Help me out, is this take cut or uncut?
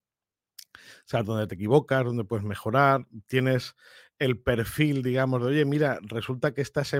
uncut